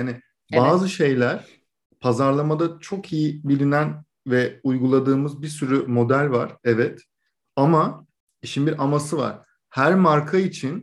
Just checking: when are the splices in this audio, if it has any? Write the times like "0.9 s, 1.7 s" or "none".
none